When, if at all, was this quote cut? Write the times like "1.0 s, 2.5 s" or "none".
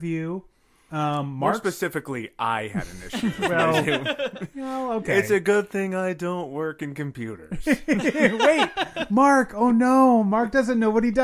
none